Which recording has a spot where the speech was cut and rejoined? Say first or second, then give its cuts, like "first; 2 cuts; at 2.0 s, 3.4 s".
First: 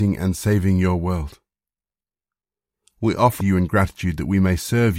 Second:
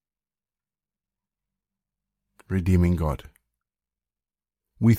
first; 1 cut; at 3.4 s